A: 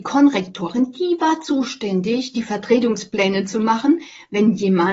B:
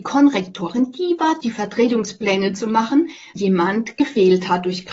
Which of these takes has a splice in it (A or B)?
B